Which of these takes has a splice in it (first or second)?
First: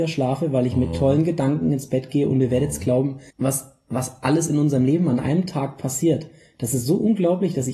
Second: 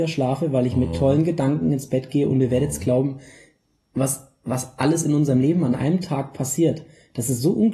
first